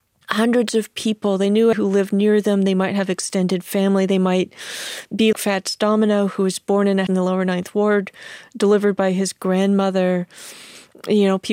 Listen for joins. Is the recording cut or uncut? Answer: cut